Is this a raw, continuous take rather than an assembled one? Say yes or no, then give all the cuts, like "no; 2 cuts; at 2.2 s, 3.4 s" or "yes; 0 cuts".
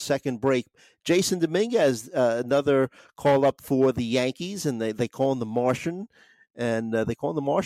yes; 0 cuts